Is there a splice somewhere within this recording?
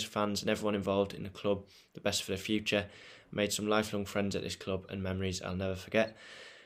no; 0 cuts

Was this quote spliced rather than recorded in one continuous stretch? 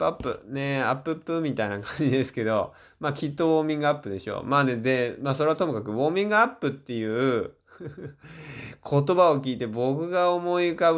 no; 0 cuts

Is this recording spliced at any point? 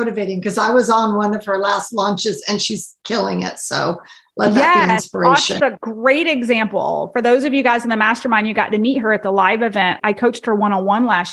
no; 0 cuts

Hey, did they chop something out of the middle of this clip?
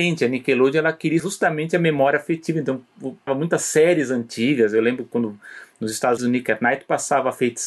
yes; 3 cuts; at 1.2 s, 3.3 s, 6.2 s

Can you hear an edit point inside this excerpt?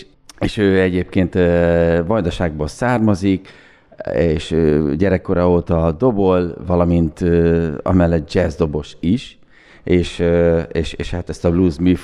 no; 0 cuts

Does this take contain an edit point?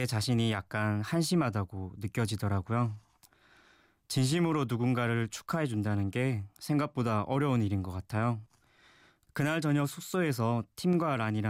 no; 0 cuts

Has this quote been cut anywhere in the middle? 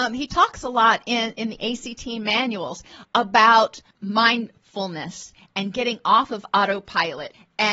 no; 0 cuts

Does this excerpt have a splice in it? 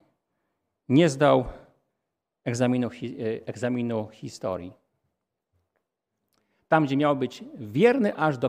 no; 0 cuts

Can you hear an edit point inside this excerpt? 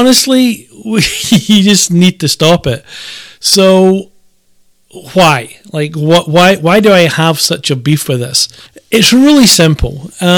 yes; 1 cut; at 8.7 s

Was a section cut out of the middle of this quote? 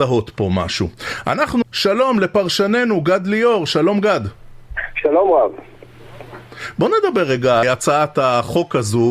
yes; 2 cuts; at 1.6 s, 7.6 s

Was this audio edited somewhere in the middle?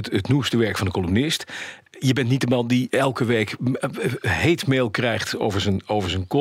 no; 0 cuts

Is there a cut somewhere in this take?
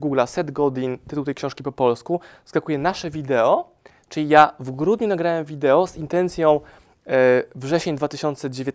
no; 0 cuts

